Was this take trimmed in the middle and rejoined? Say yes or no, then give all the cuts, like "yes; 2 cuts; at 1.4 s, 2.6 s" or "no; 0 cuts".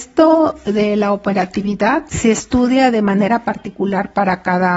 no; 0 cuts